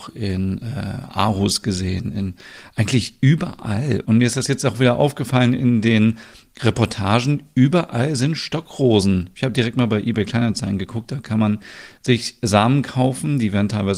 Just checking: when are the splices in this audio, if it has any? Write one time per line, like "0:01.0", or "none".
none